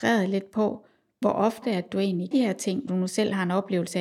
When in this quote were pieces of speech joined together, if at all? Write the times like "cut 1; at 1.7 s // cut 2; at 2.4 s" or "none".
cut 1; at 1.2 s // cut 2; at 1.6 s // cut 3; at 2.3 s // cut 4; at 2.9 s